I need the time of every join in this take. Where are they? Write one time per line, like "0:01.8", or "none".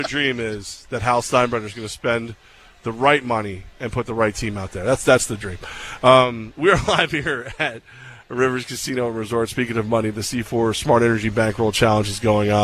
none